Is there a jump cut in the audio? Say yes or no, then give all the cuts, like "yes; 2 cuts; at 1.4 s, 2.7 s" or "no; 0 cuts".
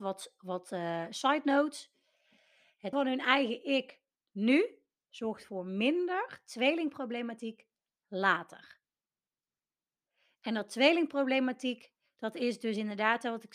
yes; 1 cut; at 2.9 s